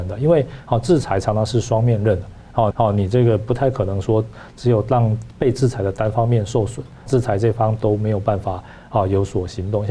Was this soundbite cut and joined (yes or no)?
yes